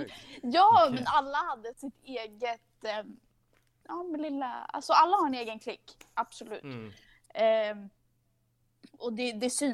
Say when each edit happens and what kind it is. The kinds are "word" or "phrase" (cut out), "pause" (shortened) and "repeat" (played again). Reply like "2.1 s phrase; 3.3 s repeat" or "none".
none